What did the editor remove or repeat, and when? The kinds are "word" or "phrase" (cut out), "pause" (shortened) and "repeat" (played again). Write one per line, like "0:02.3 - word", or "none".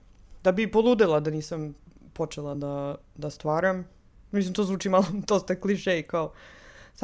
none